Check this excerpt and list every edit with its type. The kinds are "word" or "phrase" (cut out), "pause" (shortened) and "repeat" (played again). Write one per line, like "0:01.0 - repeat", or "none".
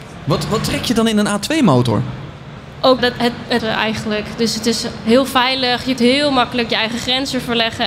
0:03.0 - word
0:03.6 - word
0:06.0 - word